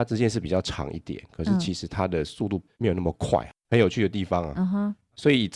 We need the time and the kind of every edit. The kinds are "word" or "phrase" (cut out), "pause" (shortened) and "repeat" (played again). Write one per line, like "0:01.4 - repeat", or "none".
none